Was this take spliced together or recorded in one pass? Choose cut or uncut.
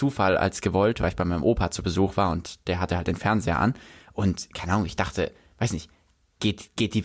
uncut